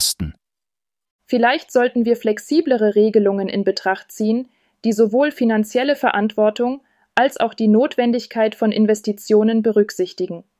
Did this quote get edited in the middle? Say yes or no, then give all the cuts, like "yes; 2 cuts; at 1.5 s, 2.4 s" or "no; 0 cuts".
no; 0 cuts